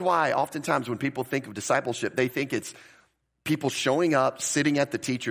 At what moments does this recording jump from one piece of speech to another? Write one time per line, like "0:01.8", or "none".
none